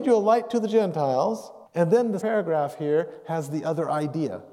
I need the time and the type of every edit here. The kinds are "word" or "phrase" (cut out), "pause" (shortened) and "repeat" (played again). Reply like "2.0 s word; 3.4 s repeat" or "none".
1.7 s pause; 2.2 s word

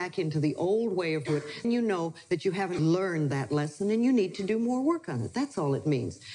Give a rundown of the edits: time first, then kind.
1.2 s word; 1.6 s word; 2.8 s word

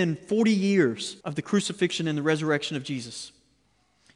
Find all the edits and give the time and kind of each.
1.2 s pause

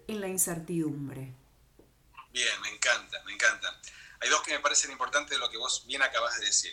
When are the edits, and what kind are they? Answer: 2.3 s pause; 4.4 s word

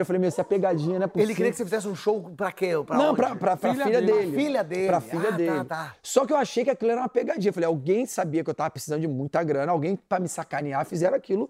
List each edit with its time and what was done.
3.6 s word

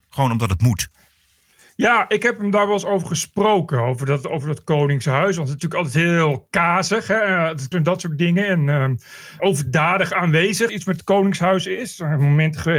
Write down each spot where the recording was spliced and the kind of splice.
5.6 s word; 7.7 s word; 9.4 s word; 10.7 s word

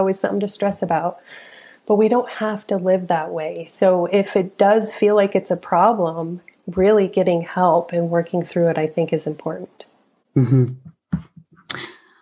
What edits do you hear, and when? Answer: none

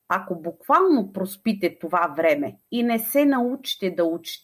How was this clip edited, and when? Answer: 2.6 s pause

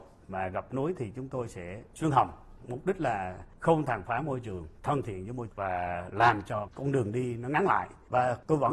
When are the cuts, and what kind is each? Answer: 1.9 s word; 4.8 s pause; 5.5 s word

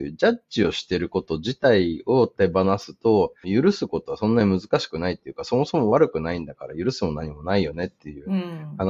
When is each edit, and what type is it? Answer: 3.4 s phrase

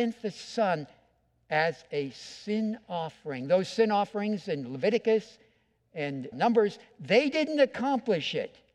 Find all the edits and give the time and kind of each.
6.3 s word

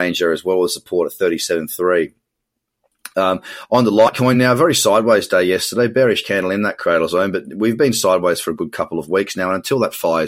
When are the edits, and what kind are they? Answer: none

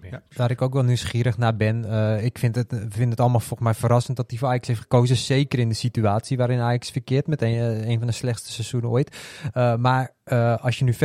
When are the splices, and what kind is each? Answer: none

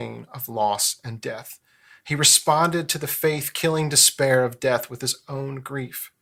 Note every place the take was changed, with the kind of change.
none

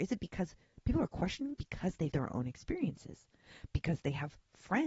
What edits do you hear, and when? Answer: 1.5 s word; 2.1 s word

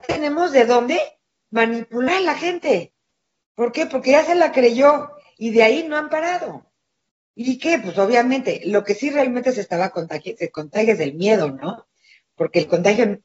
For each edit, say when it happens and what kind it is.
none

